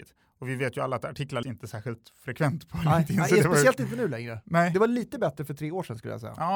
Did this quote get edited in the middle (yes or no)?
yes